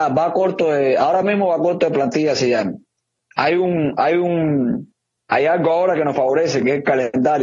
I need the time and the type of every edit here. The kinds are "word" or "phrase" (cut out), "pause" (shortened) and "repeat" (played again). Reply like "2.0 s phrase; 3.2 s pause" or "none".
none